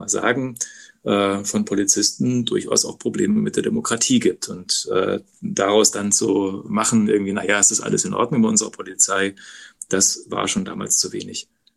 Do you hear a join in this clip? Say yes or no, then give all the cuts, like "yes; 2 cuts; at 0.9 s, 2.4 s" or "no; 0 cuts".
no; 0 cuts